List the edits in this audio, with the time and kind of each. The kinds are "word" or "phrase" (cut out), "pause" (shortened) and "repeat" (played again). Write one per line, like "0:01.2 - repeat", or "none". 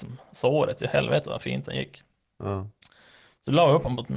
none